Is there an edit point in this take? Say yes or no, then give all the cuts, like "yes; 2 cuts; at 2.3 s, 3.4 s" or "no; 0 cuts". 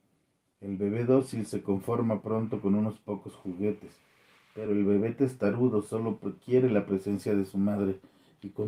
no; 0 cuts